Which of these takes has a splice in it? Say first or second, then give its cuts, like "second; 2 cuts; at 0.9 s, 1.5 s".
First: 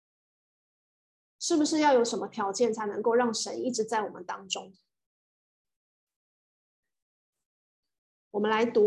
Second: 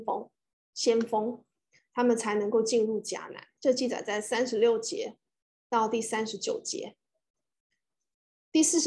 second; 1 cut; at 3.5 s